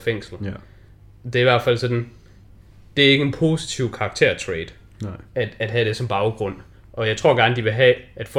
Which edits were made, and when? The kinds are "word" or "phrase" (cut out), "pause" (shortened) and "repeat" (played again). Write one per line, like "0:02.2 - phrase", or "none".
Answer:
none

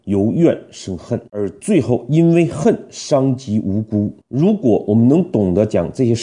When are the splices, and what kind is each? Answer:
0:01.3 - pause
0:04.2 - pause

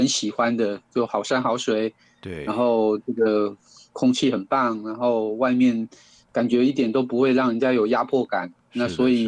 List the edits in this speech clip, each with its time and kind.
none

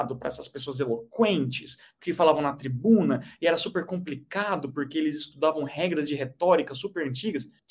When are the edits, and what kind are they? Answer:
none

